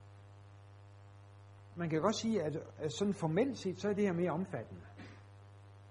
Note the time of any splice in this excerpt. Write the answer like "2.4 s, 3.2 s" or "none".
none